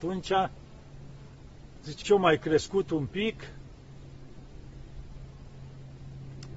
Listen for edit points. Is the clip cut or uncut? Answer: cut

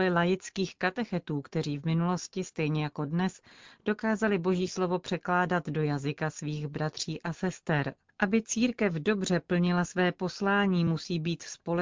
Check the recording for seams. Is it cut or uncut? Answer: uncut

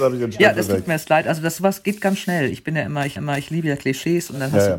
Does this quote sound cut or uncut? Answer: cut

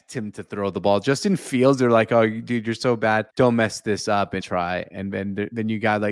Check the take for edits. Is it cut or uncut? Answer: cut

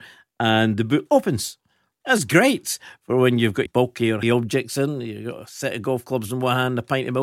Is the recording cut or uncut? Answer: cut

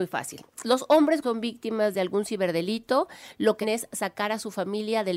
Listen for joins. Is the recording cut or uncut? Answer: cut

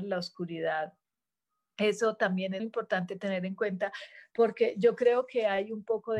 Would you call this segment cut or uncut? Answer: cut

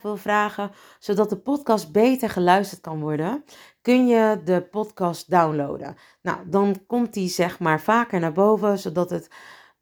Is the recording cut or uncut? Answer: uncut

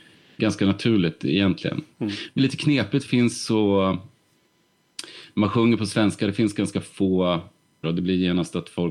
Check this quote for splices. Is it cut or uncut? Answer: cut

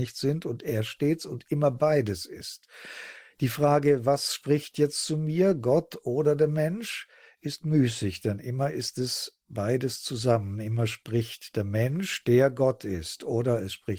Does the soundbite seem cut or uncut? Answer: uncut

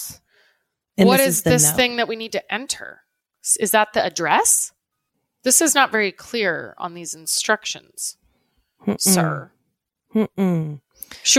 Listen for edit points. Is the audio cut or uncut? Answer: uncut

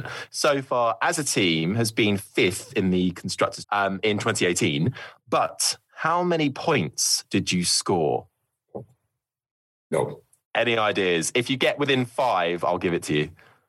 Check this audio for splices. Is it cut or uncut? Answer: cut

